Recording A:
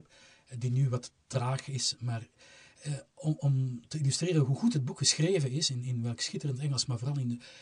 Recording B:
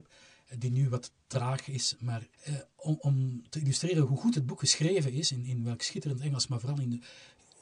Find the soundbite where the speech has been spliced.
B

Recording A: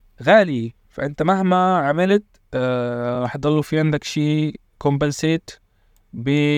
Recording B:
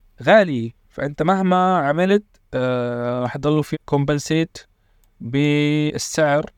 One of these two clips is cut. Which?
B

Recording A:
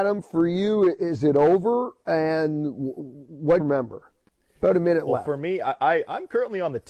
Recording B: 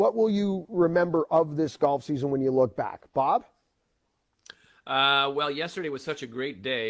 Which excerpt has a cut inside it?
A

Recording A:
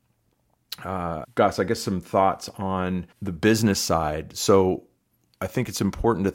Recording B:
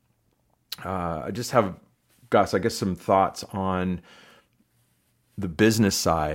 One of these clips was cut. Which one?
A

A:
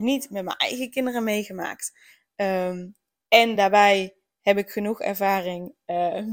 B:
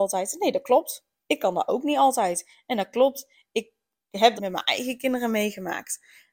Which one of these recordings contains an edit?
B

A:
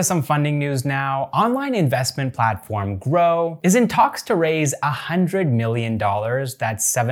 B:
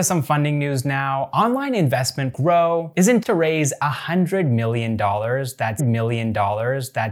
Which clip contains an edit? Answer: B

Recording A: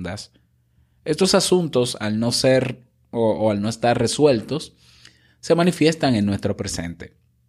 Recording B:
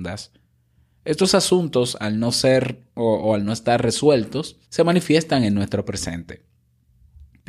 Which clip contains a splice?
B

